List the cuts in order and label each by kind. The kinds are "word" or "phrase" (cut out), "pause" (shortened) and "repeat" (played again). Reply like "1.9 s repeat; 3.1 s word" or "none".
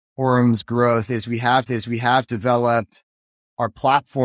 1.7 s repeat